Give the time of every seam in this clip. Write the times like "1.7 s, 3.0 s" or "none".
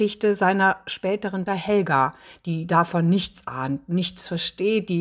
1.5 s